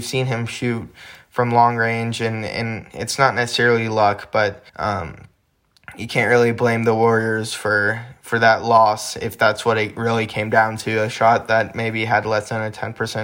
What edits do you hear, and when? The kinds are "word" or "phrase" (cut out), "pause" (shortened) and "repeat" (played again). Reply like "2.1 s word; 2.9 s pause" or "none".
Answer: 4.7 s pause